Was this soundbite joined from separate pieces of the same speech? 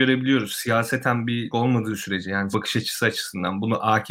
yes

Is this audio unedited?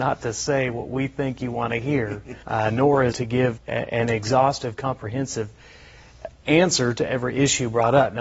no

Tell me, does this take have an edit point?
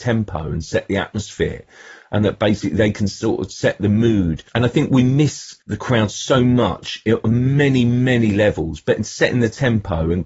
yes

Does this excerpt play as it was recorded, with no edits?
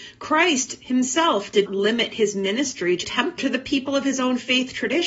no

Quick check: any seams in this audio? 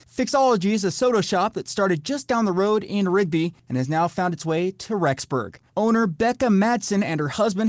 yes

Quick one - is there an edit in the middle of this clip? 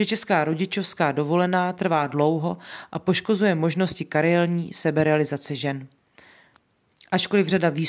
no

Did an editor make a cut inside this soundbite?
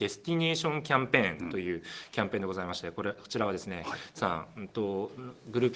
yes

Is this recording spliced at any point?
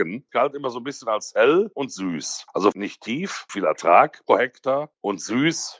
yes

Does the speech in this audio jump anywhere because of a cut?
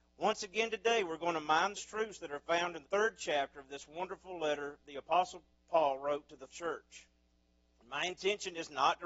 yes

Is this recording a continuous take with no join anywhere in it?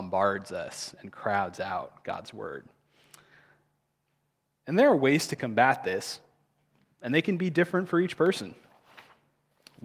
yes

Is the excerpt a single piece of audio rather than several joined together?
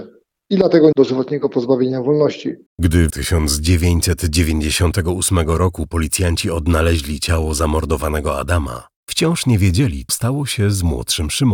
no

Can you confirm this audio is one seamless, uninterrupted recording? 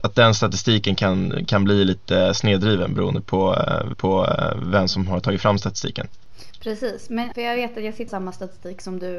no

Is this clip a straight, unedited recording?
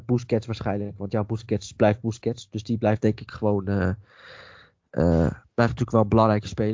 yes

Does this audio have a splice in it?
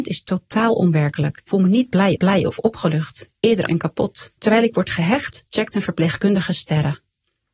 yes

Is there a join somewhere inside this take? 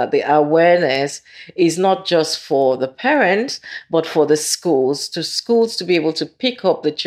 no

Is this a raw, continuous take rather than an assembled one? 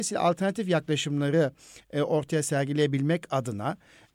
yes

